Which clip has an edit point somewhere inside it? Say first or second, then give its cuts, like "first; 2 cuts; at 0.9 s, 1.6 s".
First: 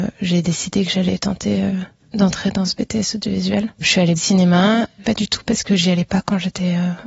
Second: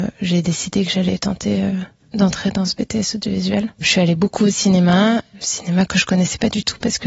first; 2 cuts; at 4.2 s, 5.0 s